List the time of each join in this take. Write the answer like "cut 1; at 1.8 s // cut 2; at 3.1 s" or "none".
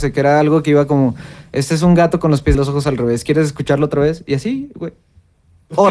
cut 1; at 2.5 s